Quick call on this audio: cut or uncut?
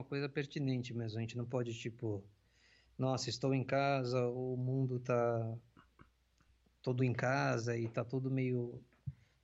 cut